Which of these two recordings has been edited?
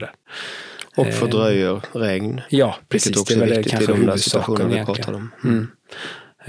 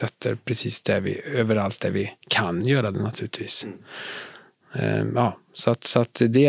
second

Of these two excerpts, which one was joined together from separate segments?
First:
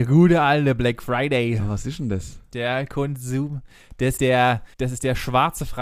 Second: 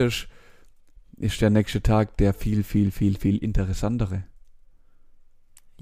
first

